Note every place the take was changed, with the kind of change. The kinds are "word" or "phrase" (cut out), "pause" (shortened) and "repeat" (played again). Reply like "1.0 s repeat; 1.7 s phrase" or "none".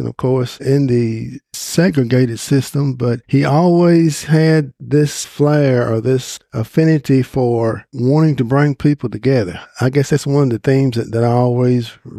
3.2 s pause; 5.2 s word